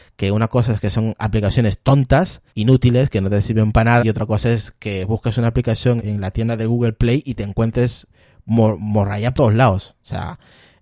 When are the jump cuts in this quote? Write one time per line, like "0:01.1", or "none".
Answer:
0:02.5
0:04.0
0:06.0
0:09.3